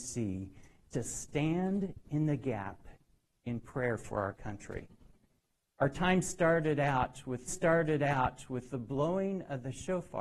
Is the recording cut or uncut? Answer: cut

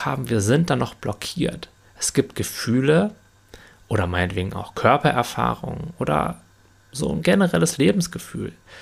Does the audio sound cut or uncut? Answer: uncut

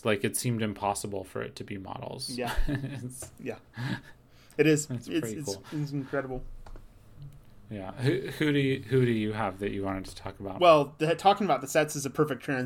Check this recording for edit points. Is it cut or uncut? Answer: uncut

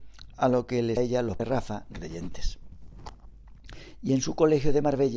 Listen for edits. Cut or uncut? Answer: cut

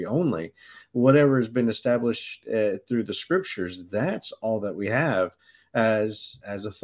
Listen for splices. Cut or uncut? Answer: uncut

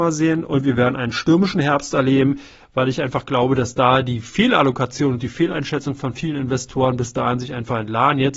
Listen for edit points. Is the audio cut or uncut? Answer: uncut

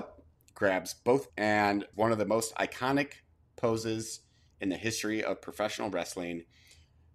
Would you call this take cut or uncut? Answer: cut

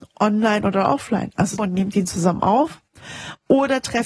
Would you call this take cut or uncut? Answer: cut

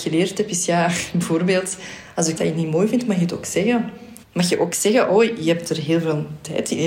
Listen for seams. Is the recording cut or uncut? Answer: cut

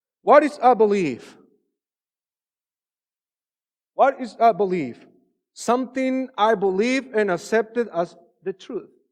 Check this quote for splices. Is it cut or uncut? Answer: uncut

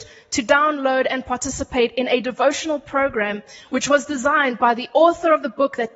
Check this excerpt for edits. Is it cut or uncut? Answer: uncut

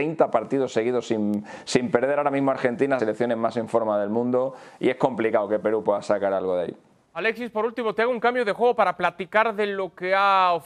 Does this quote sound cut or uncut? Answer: cut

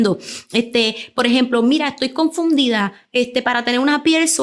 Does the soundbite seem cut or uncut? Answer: uncut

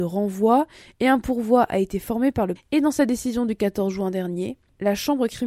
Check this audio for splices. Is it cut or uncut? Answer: cut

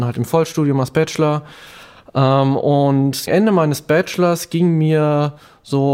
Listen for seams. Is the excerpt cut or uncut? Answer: cut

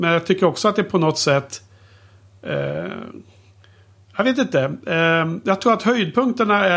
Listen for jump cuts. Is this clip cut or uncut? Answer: uncut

